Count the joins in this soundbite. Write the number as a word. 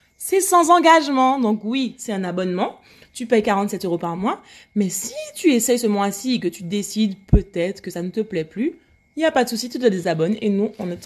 zero